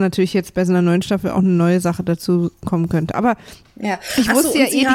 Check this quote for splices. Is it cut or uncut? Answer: uncut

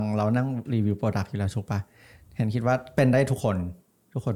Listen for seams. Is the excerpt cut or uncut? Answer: uncut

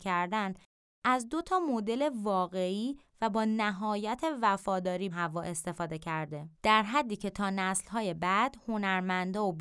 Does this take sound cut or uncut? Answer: cut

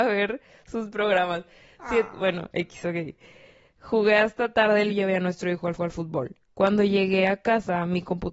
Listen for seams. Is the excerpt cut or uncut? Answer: cut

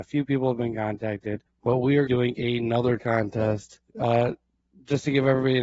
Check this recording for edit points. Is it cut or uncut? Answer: cut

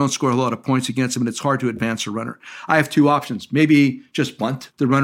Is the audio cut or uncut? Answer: uncut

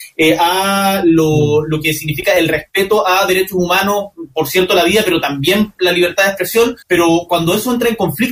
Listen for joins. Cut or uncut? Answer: cut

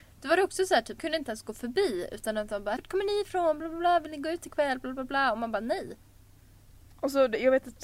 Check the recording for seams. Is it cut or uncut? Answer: cut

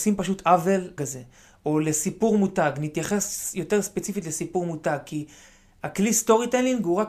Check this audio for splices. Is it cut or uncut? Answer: cut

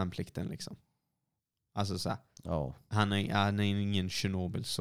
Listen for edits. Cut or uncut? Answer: uncut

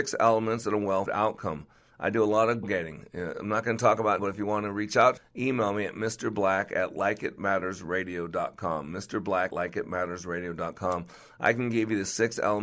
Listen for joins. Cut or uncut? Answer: cut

